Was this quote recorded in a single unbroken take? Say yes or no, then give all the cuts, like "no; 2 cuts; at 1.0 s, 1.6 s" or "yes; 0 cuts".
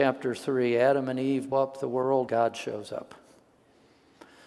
no; 2 cuts; at 1.5 s, 2.3 s